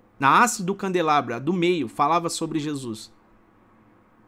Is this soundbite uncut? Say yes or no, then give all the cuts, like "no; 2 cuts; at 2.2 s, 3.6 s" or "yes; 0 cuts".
yes; 0 cuts